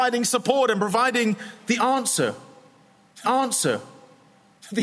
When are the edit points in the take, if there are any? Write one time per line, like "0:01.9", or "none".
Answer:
0:03.2